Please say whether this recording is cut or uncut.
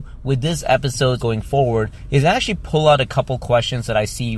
cut